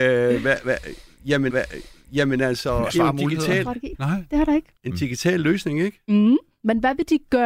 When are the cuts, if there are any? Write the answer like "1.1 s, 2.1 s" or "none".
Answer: 1.5 s, 2.9 s, 3.9 s, 4.8 s